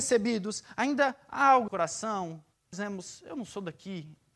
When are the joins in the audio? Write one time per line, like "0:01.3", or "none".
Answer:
0:01.7
0:02.7